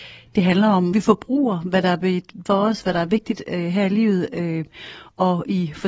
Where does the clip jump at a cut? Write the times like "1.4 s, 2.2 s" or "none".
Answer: 0.9 s, 2.5 s